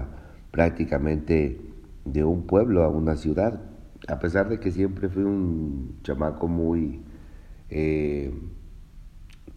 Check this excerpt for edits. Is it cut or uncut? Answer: uncut